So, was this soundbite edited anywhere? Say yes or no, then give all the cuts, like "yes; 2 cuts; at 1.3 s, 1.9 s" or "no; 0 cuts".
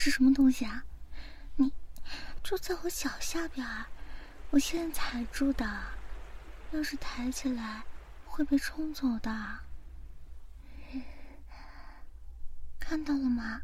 yes; 1 cut; at 2.4 s